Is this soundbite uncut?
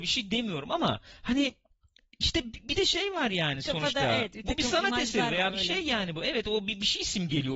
yes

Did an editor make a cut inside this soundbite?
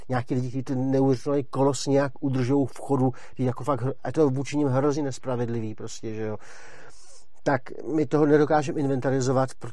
no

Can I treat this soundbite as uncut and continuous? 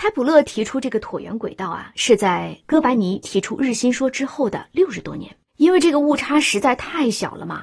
no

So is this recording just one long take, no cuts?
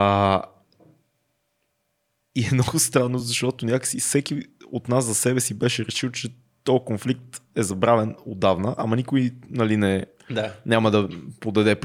yes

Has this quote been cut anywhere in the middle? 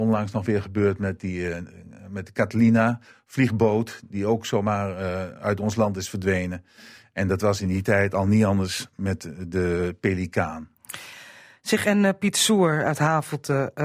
no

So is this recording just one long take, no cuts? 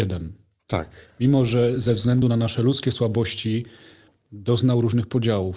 yes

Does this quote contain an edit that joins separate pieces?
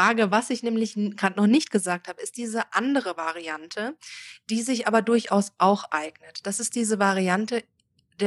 no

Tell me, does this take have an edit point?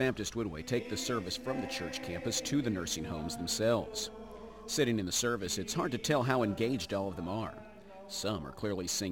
no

